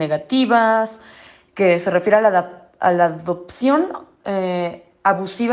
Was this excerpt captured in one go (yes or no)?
yes